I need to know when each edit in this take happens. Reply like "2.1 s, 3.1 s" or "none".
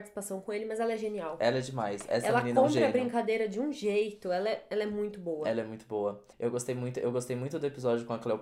6.3 s